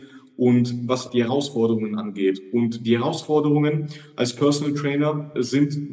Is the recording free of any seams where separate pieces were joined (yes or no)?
no